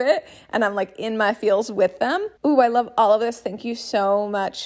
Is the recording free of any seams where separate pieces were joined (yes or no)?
no